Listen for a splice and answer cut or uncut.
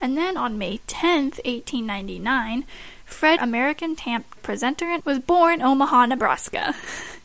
cut